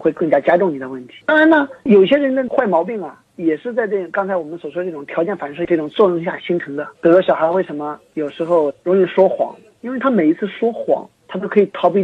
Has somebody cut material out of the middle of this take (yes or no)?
yes